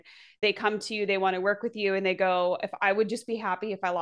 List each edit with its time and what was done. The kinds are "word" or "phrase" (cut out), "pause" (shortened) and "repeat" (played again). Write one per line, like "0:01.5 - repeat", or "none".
none